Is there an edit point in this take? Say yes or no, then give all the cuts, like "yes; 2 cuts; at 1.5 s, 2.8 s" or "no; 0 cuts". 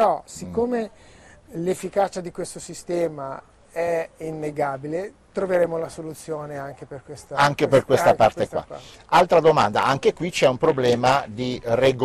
no; 0 cuts